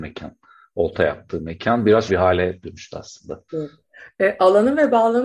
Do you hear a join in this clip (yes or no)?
yes